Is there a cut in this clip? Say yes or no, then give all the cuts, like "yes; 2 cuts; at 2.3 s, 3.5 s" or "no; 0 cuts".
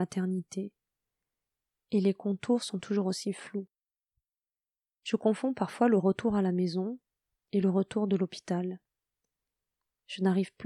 no; 0 cuts